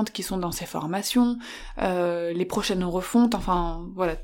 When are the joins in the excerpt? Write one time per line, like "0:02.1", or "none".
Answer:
none